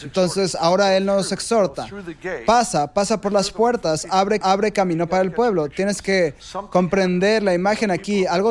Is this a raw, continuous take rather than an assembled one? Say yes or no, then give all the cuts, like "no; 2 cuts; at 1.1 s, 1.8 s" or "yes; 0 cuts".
no; 1 cut; at 4.4 s